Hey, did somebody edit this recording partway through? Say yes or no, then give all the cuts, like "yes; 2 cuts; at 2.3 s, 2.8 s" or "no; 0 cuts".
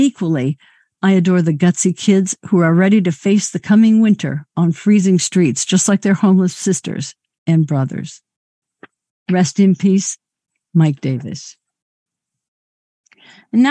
no; 0 cuts